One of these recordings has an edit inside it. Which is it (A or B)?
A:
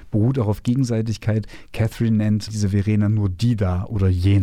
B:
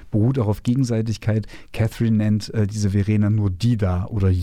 A